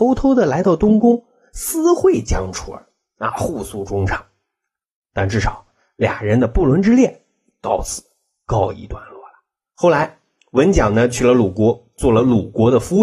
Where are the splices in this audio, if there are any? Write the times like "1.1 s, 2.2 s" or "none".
none